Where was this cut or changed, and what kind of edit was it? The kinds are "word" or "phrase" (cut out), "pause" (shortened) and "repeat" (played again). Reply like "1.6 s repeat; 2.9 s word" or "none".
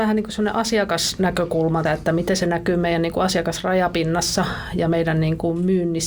1.8 s word

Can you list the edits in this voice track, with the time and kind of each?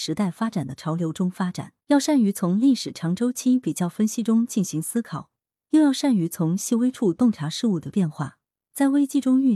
1.8 s pause

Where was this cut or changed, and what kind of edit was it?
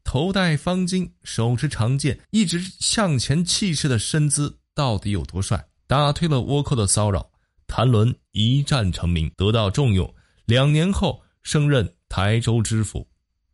2.2 s pause; 5.8 s pause; 9.3 s pause

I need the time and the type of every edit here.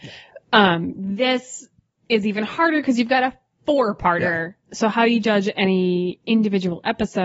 4.6 s pause

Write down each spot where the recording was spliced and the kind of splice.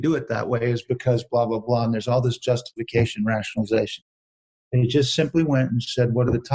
none

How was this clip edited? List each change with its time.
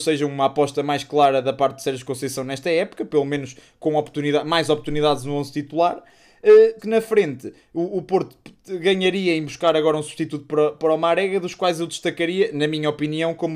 6.8 s word

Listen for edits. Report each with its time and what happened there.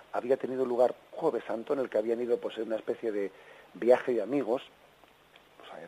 1.1 s word

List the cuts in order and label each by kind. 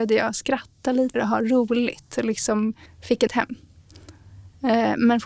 1.1 s word; 2.9 s pause; 3.3 s phrase

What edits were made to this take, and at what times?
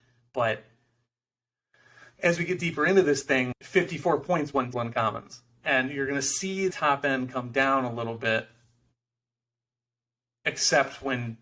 3.5 s word; 4.7 s word; 6.7 s word

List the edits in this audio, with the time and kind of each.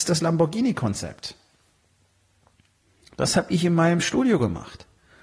none

